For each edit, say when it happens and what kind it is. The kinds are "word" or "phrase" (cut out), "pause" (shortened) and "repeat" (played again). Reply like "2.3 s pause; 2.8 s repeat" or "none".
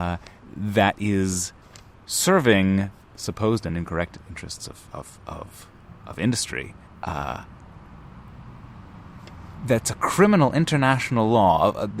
none